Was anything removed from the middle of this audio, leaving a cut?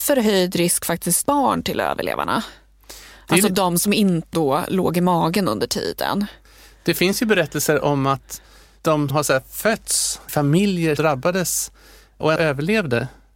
yes; 6 cuts; at 1.2 s, 4.3 s, 9.1 s, 10.3 s, 11.0 s, 12.4 s

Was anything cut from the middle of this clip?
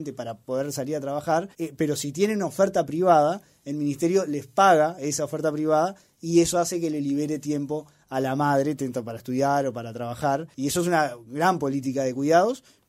yes; 2 cuts; at 1.5 s, 10.5 s

